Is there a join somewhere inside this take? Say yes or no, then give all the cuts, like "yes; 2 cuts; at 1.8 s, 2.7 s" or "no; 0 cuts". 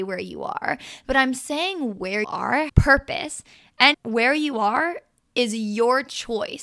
yes; 3 cuts; at 2.2 s, 2.7 s, 3.9 s